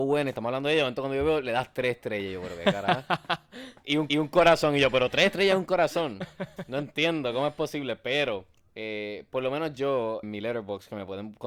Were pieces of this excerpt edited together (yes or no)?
yes